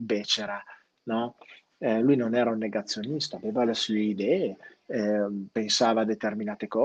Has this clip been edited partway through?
no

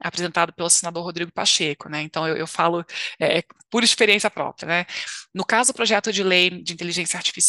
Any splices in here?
no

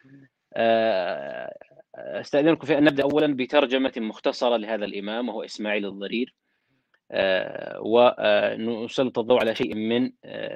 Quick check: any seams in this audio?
no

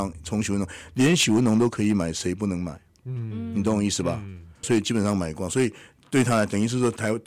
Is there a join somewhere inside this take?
yes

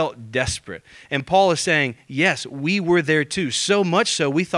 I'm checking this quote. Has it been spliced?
no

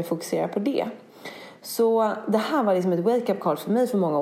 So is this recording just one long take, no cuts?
yes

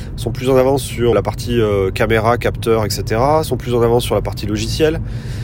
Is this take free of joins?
no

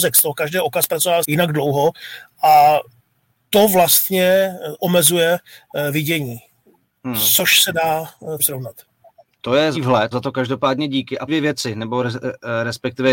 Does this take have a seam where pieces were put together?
yes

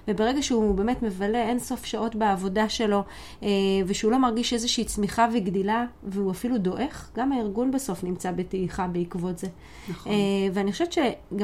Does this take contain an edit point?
no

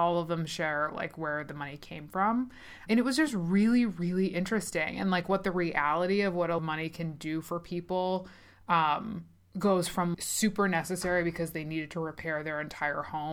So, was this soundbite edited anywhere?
yes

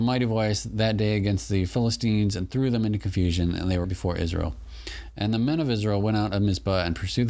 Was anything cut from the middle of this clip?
yes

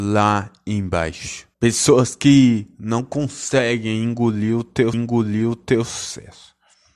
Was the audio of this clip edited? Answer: yes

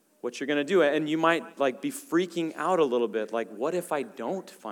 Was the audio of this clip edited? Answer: no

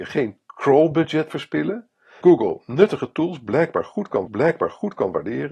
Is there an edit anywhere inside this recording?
yes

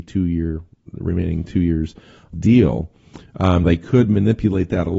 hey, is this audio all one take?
no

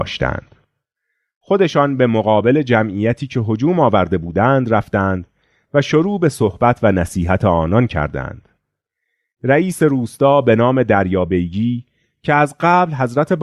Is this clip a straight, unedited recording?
yes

